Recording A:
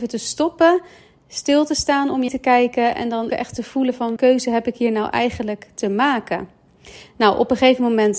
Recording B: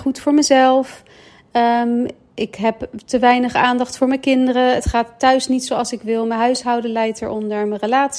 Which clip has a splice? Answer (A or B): A